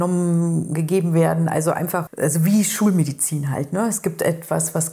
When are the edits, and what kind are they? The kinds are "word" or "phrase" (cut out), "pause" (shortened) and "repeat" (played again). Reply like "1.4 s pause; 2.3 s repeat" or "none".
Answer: 2.1 s word